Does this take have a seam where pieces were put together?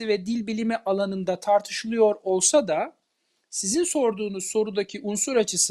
no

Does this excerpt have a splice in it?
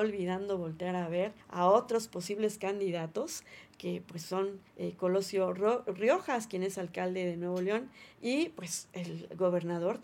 yes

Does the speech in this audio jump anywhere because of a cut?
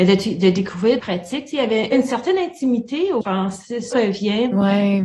yes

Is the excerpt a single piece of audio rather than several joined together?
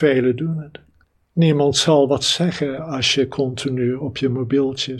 yes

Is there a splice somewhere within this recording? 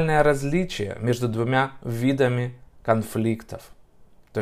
no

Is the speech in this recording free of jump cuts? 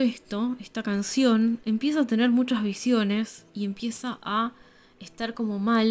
yes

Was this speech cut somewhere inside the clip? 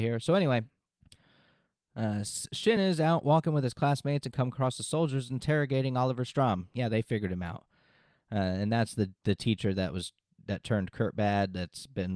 no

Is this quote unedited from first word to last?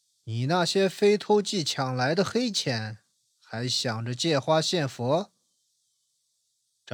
yes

